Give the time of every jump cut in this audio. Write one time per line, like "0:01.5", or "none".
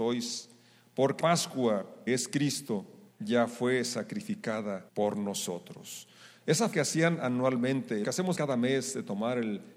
0:01.2
0:02.1
0:03.1
0:04.9
0:06.7
0:08.0
0:08.4